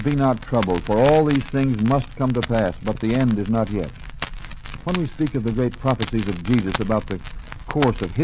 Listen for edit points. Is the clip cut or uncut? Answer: uncut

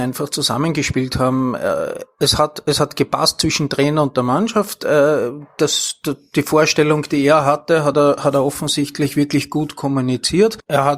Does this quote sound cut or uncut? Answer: uncut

